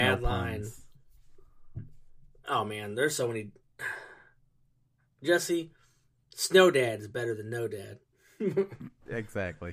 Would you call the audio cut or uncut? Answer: uncut